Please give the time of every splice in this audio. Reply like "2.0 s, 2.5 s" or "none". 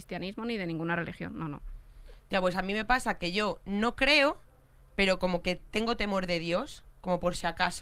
none